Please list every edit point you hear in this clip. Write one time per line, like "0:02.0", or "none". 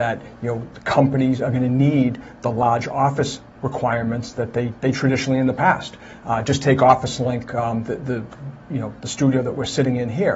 0:04.9